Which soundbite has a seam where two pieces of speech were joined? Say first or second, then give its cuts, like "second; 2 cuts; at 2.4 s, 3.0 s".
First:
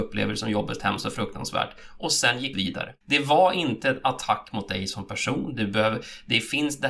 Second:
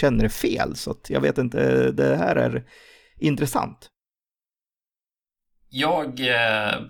first; 2 cuts; at 2.5 s, 3.0 s